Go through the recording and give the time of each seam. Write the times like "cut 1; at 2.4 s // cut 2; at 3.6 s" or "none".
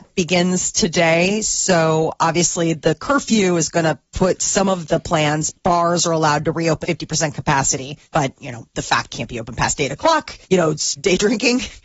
cut 1; at 4.0 s // cut 2; at 5.5 s // cut 3; at 6.8 s // cut 4; at 8.0 s // cut 5; at 8.7 s // cut 6; at 9.1 s // cut 7; at 10.4 s // cut 8; at 11.0 s